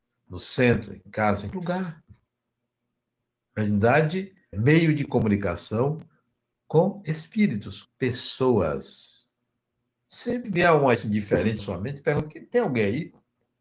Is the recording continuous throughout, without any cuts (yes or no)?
no